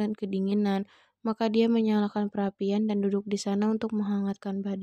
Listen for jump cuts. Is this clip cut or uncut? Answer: uncut